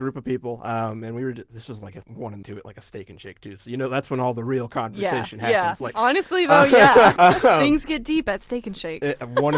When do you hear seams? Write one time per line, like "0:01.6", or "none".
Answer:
0:02.0
0:02.4
0:07.2